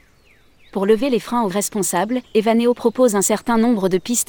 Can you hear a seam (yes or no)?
yes